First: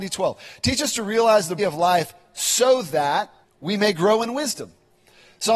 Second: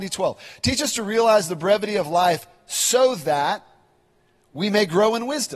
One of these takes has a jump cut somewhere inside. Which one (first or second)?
first